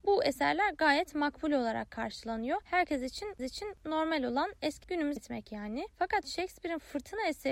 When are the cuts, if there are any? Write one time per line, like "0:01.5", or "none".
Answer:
0:03.4
0:04.8
0:05.2